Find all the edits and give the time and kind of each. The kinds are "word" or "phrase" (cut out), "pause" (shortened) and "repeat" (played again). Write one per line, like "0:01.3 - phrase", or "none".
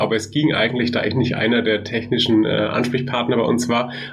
none